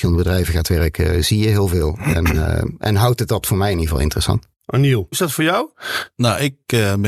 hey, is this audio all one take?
yes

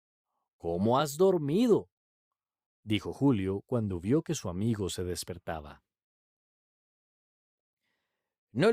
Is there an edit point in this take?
no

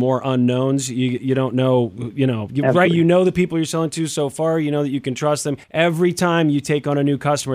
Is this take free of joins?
no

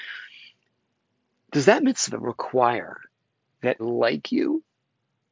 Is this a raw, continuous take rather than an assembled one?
no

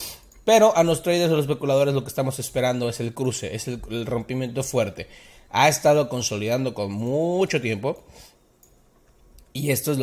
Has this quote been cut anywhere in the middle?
no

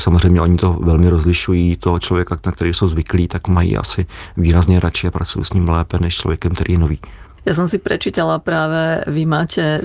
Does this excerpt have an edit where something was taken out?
no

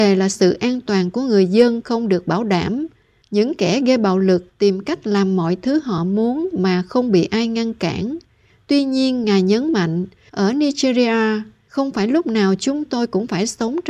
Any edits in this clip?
no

